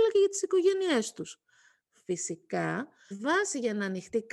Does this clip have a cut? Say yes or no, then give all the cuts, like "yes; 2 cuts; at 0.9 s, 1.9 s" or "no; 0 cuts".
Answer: yes; 1 cut; at 3.1 s